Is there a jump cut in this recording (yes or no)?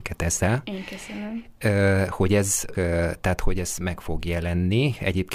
yes